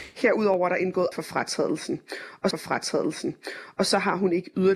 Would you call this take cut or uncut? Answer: cut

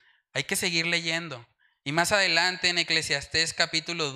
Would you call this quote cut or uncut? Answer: uncut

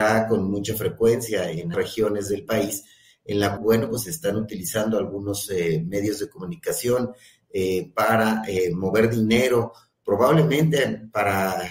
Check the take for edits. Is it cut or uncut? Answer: cut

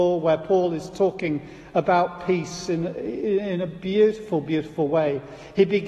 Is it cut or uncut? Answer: uncut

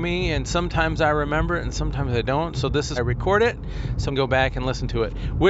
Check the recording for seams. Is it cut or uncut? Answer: cut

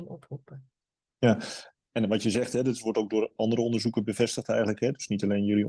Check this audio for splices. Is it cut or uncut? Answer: uncut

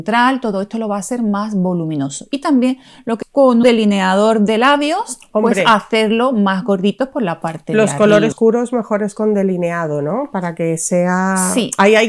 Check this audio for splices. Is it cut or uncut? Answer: cut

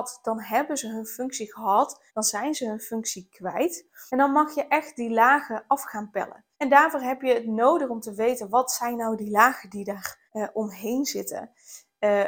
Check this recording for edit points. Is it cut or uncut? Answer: cut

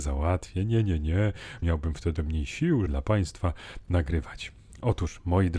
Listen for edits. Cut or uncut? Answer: cut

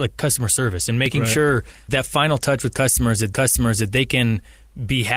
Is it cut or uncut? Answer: cut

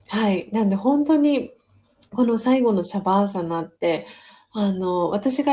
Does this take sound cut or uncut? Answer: uncut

